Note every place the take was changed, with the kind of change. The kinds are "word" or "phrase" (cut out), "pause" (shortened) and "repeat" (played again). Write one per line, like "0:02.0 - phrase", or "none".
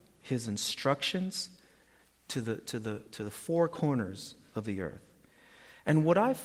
none